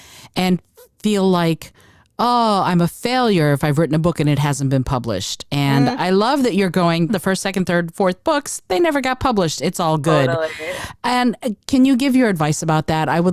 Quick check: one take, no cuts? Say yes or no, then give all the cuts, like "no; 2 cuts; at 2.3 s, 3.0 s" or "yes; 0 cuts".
no; 1 cut; at 7.1 s